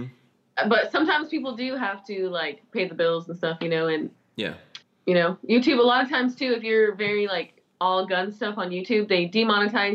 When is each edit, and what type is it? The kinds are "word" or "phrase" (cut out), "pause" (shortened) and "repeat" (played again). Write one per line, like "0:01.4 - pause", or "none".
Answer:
0:04.8 - pause

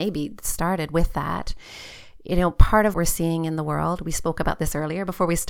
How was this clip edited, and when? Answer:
0:02.9 - word

